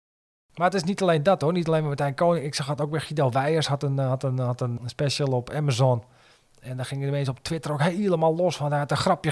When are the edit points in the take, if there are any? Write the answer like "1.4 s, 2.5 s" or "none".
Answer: 4.8 s